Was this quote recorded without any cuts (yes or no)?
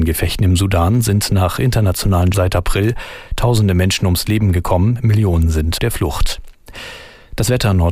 no